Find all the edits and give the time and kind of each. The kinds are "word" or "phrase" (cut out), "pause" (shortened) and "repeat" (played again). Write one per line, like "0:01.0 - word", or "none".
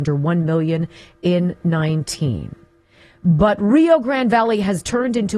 none